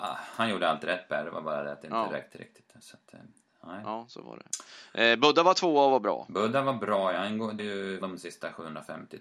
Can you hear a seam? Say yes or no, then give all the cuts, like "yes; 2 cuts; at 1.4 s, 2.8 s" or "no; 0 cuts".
yes; 2 cuts; at 7.6 s, 8.0 s